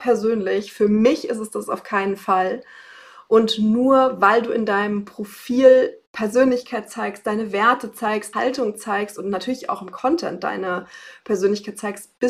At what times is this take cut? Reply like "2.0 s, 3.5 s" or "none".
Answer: 8.3 s